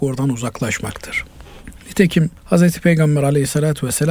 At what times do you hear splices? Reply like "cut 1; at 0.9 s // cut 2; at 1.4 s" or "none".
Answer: cut 1; at 2.4 s